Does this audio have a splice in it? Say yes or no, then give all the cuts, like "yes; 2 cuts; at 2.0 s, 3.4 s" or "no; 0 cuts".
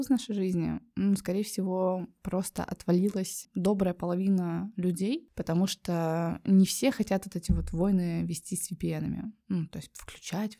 no; 0 cuts